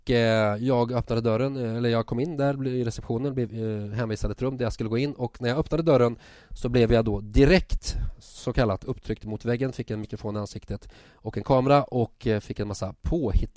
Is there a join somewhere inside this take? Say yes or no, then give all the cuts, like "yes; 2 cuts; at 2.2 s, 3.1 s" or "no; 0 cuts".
no; 0 cuts